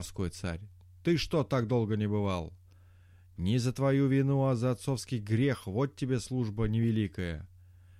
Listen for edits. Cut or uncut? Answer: uncut